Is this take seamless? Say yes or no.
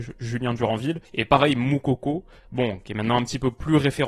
no